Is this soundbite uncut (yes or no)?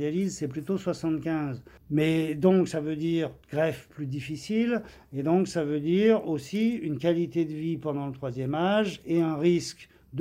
no